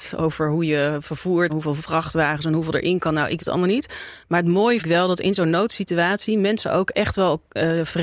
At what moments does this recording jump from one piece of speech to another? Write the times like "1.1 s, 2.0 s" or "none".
1.5 s, 3.4 s, 4.8 s